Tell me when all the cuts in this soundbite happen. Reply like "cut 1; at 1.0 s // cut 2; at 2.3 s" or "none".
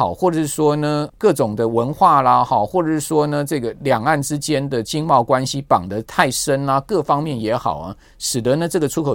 cut 1; at 1.1 s